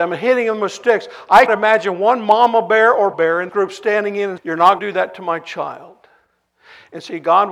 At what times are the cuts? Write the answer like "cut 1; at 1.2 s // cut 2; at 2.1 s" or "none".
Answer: cut 1; at 1.5 s // cut 2; at 3.1 s // cut 3; at 3.5 s // cut 4; at 4.4 s // cut 5; at 4.8 s